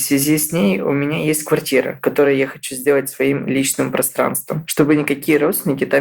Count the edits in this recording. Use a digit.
0